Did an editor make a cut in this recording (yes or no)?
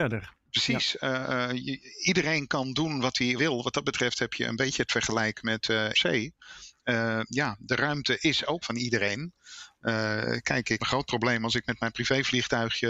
yes